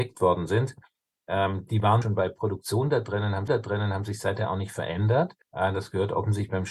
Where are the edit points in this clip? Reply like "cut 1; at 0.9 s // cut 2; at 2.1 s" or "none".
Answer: cut 1; at 2.0 s // cut 2; at 3.5 s // cut 3; at 5.4 s